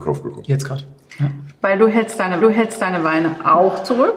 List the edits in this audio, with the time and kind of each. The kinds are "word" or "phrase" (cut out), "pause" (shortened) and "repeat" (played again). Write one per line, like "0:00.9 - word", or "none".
0:02.4 - repeat